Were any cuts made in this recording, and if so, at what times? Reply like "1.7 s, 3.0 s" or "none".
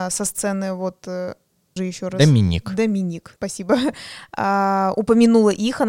1.8 s, 3.4 s